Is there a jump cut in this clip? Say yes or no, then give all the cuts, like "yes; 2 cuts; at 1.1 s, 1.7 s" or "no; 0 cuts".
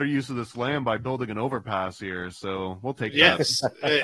no; 0 cuts